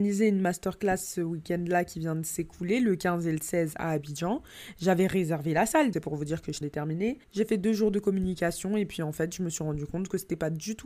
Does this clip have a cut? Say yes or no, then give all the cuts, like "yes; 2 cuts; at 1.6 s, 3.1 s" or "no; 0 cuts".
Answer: yes; 3 cuts; at 5.9 s, 6.6 s, 7.2 s